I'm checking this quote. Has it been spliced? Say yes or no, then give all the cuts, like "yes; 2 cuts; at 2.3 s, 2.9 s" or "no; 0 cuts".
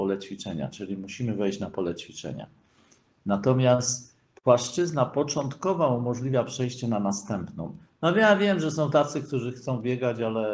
no; 0 cuts